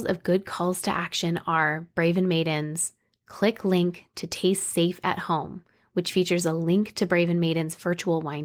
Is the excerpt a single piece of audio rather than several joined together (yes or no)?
yes